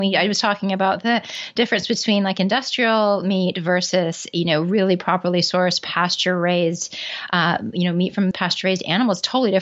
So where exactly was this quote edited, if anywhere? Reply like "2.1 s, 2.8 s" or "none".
8.3 s

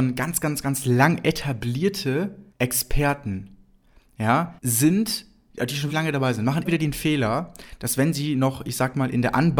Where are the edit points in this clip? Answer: 2.5 s, 4.6 s, 5.9 s, 6.6 s

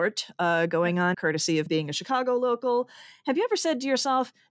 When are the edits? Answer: 1.1 s, 1.7 s

